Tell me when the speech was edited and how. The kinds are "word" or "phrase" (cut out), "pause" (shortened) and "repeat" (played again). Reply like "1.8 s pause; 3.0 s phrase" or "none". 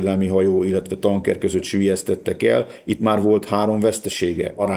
none